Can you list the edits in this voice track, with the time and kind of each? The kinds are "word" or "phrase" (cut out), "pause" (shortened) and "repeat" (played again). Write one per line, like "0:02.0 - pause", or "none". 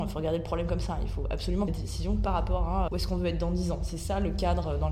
0:01.7 - word
0:02.9 - word